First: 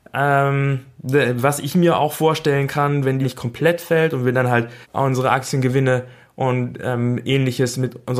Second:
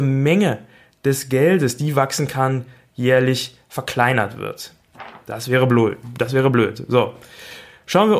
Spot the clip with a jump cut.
first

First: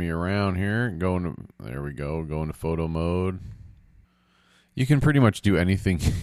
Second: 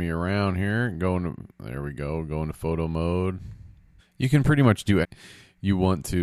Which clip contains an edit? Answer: second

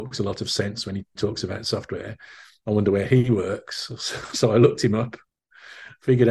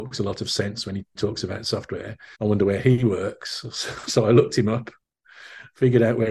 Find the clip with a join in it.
second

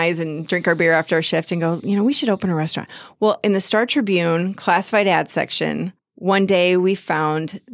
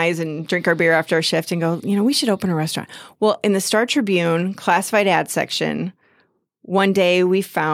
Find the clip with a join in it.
first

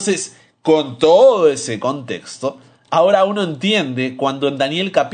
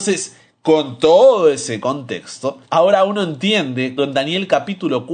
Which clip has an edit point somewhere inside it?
second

